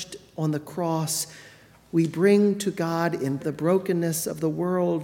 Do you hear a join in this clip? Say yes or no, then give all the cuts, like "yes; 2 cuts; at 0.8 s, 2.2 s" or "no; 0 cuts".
yes; 1 cut; at 3.4 s